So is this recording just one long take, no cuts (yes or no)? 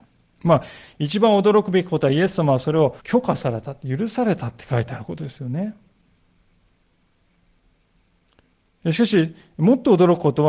no